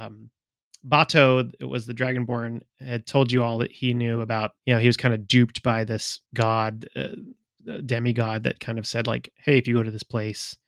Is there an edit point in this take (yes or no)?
yes